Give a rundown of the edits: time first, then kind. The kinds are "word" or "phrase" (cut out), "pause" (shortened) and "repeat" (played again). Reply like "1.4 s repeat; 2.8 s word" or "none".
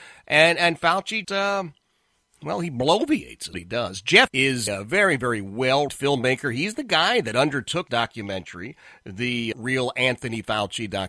1.2 s word; 3.5 s word; 4.3 s word; 4.7 s word; 5.9 s word; 7.9 s word; 9.5 s word